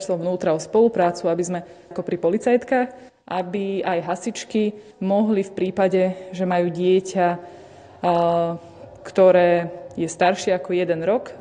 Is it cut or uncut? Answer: cut